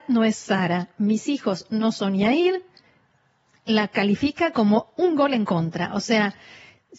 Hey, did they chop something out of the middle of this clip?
no; 0 cuts

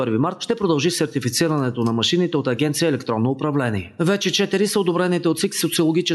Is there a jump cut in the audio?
no; 0 cuts

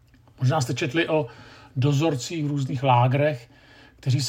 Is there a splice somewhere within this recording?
no; 0 cuts

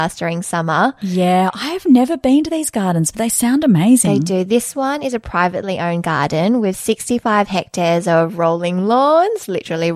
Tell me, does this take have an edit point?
no; 0 cuts

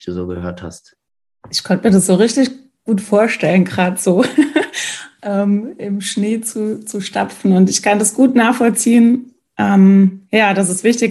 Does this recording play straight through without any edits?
yes; 0 cuts

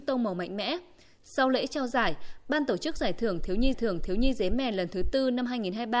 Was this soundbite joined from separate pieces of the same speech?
yes; 1 cut; at 3.7 s

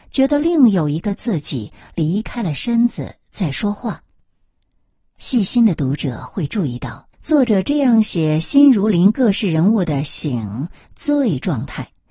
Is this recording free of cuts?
no; 1 cut; at 7.1 s

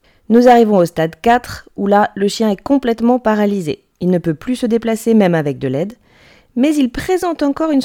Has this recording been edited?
no; 0 cuts

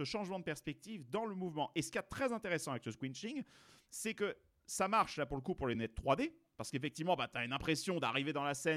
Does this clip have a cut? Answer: no; 0 cuts

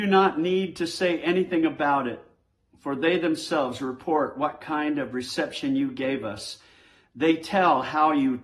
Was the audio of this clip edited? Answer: no; 0 cuts

